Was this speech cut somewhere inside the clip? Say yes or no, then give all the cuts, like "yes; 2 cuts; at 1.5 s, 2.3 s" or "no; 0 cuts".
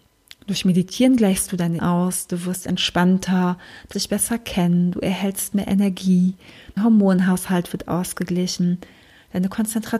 yes; 3 cuts; at 1.8 s, 3.9 s, 6.8 s